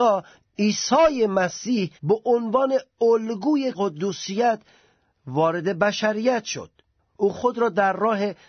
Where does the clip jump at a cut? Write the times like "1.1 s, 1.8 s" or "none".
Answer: 2.0 s, 3.7 s, 7.3 s